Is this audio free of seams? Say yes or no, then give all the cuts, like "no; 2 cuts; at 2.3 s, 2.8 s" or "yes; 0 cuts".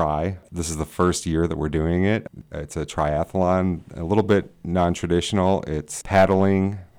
yes; 0 cuts